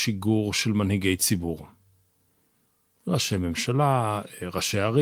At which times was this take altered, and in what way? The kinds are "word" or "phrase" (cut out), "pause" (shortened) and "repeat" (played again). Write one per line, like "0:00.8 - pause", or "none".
none